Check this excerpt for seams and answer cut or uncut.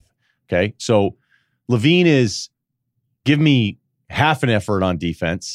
uncut